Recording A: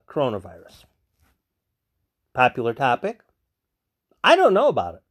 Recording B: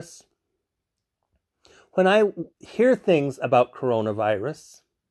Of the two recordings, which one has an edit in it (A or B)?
B